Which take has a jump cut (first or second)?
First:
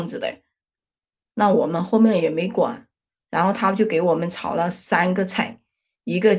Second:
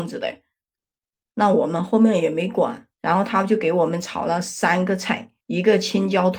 second